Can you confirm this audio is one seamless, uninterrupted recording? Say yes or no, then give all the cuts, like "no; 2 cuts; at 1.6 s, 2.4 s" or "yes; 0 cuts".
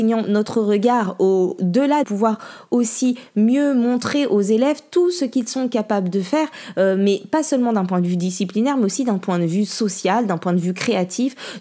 no; 1 cut; at 2.0 s